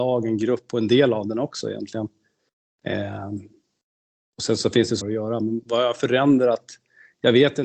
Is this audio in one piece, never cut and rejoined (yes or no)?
no